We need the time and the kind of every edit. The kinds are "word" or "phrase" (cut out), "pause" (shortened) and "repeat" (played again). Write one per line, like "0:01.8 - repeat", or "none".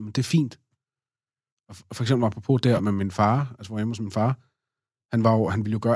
0:02.8 - word